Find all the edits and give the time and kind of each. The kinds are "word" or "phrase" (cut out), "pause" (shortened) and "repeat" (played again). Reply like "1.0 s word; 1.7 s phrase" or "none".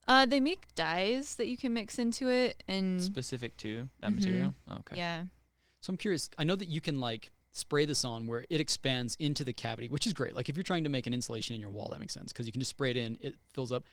6.3 s word